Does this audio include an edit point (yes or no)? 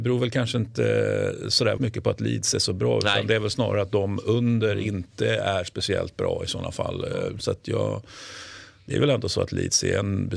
yes